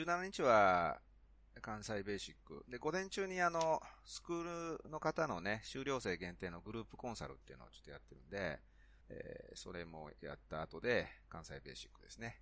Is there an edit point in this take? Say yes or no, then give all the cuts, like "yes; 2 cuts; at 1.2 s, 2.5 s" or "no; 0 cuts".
yes; 1 cut; at 9.0 s